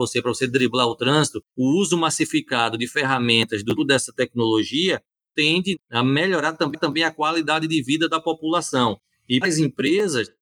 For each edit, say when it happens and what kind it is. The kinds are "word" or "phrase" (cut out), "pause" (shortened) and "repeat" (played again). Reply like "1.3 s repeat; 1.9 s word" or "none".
3.8 s word; 6.7 s repeat; 9.4 s word